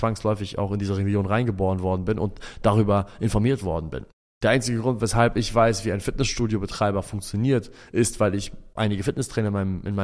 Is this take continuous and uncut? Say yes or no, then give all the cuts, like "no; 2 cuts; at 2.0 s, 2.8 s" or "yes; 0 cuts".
no; 1 cut; at 4.1 s